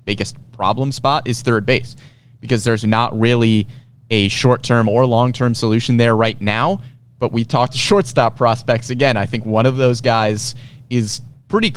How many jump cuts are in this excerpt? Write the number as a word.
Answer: one